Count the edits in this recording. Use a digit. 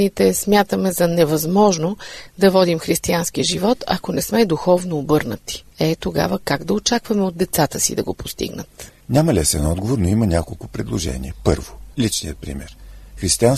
2